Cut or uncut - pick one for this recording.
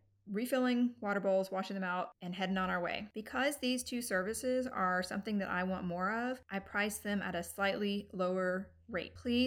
uncut